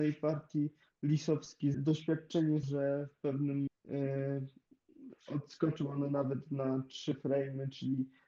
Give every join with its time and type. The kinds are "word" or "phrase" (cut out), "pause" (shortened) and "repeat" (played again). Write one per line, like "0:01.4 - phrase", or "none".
0:01.7 - phrase
0:02.6 - phrase
0:03.7 - word

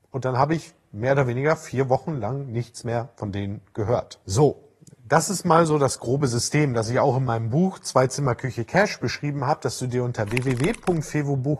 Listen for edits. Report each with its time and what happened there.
none

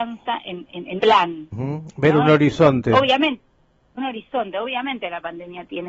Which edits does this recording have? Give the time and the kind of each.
0:01.0 - word
0:01.5 - word
0:04.0 - word

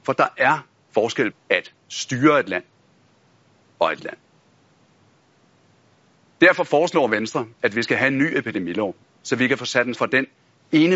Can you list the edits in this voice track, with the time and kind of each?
0:01.3 - word
0:04.0 - word
0:07.5 - pause
0:09.0 - pause
0:09.9 - word

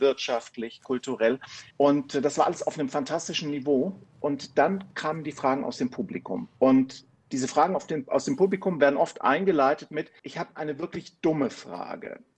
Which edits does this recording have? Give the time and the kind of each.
0:01.7 - pause
0:06.6 - pause

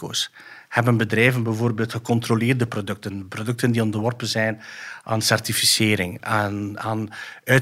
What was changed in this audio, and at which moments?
none

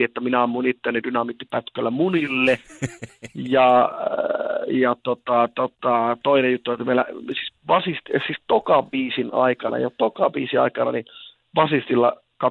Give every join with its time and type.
none

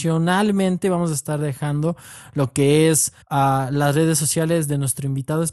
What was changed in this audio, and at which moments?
0:03.2 - pause

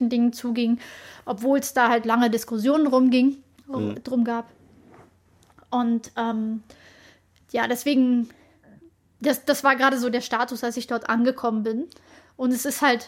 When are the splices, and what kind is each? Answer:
none

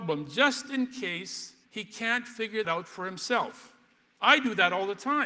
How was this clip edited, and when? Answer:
0:01.6 - pause
0:02.6 - word

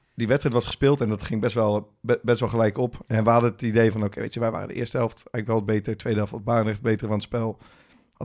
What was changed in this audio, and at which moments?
none

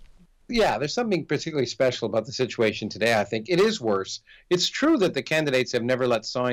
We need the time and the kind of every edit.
none

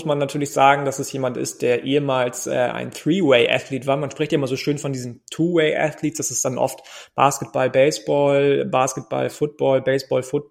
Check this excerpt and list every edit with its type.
none

